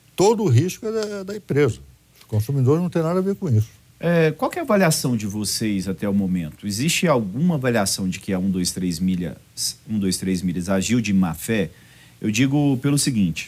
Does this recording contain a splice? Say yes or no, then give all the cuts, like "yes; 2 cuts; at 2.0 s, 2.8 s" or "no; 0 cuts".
no; 0 cuts